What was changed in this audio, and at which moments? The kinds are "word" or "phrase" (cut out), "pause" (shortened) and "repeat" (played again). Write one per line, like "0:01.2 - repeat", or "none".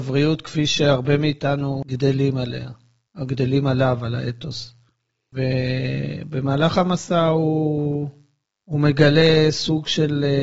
none